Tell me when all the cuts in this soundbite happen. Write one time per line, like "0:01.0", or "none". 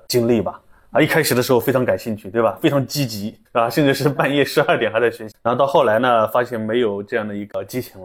0:03.5